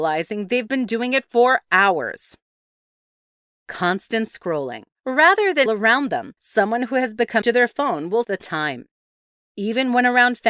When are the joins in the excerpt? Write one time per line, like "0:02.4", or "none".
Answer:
0:04.9
0:05.7
0:06.4
0:07.4
0:08.2